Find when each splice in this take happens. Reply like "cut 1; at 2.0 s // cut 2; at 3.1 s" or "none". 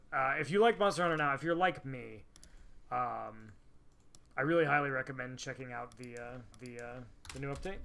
cut 1; at 4.3 s // cut 2; at 6.5 s